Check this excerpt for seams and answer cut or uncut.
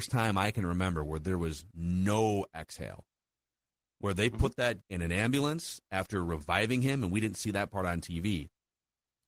cut